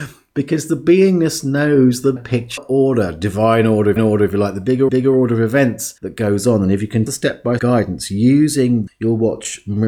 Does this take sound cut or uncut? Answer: cut